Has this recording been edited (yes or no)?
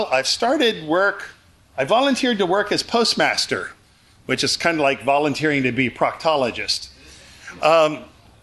no